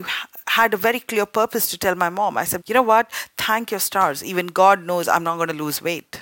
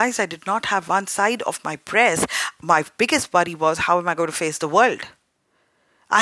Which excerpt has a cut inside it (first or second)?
first